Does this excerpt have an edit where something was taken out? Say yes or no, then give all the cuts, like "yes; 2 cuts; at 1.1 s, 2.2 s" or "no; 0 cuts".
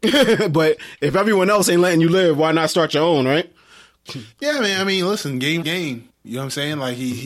yes; 1 cut; at 5.6 s